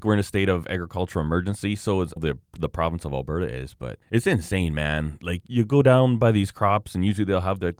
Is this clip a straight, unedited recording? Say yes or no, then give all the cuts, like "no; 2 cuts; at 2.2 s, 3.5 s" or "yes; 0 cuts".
no; 2 cuts; at 2.2 s, 4.0 s